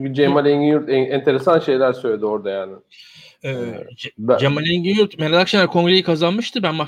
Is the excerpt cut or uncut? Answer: uncut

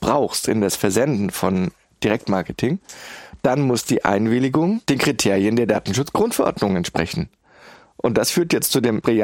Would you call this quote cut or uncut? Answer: uncut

